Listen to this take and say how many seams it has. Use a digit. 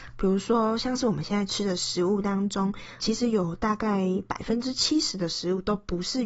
1